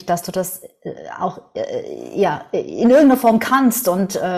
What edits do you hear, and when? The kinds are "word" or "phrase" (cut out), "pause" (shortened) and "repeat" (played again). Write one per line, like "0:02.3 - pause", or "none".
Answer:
none

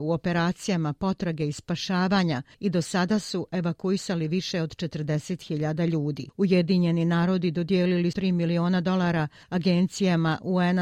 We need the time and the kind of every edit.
0:08.1 - word

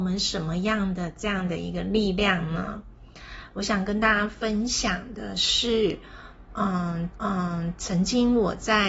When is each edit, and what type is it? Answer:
0:07.1 - repeat

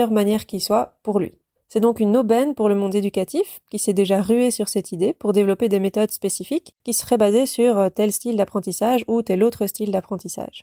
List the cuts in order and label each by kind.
0:01.6 - pause
0:06.8 - pause

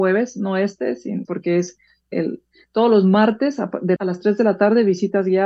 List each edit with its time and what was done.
0:01.3 - word
0:02.1 - word
0:04.0 - word

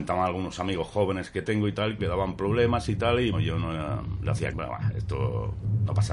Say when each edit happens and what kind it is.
0:02.0 - phrase
0:03.3 - word
0:04.5 - word

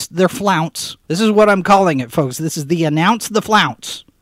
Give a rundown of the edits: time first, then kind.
0:01.0 - pause

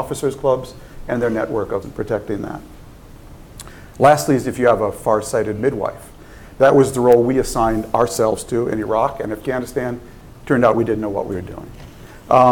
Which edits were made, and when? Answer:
0:01.8 - word

